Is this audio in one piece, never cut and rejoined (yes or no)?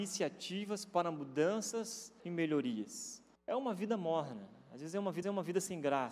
no